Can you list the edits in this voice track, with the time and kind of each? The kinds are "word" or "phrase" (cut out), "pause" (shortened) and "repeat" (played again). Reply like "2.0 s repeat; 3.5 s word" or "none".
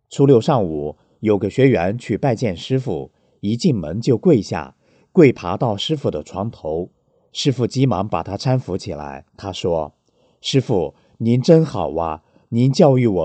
9.3 s pause